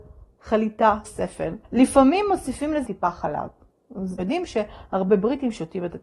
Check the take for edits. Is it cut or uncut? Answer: cut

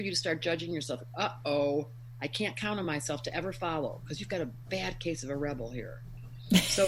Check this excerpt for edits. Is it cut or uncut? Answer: uncut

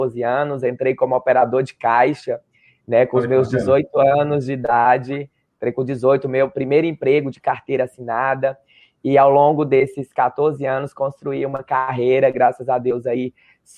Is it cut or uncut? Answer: uncut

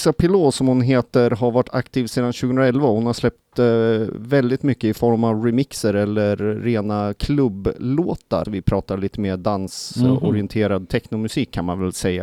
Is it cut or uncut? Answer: cut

